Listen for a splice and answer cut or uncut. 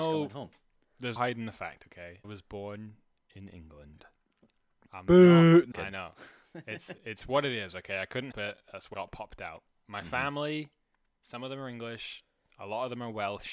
cut